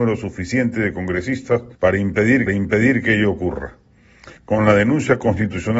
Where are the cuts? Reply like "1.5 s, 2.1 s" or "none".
1.7 s, 2.5 s, 4.4 s